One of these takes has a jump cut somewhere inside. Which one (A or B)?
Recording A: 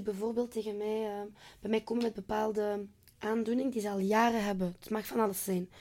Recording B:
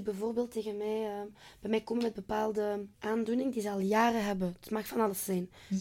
B